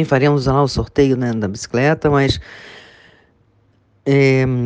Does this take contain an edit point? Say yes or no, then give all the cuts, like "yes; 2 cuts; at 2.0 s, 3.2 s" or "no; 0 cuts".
no; 0 cuts